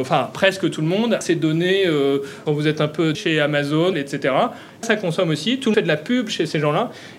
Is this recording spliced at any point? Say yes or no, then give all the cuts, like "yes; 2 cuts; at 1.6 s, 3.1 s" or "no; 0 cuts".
yes; 6 cuts; at 1.2 s, 2.5 s, 3.1 s, 3.9 s, 4.8 s, 5.7 s